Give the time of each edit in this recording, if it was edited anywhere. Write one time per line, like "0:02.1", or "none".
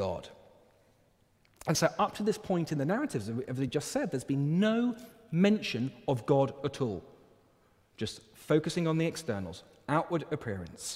none